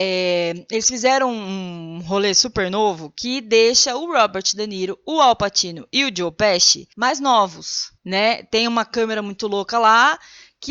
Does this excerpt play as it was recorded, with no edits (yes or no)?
no